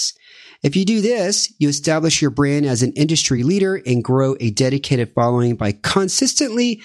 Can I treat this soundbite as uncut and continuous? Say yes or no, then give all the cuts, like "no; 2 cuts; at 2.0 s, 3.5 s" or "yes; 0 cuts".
yes; 0 cuts